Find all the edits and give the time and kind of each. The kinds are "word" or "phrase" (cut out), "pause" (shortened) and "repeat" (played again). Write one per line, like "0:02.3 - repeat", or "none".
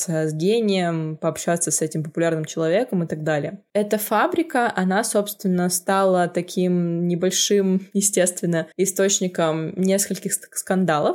0:08.7 - pause